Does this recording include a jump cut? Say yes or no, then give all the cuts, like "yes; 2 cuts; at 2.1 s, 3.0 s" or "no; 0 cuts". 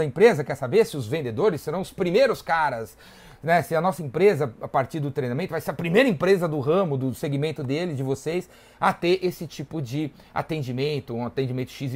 no; 0 cuts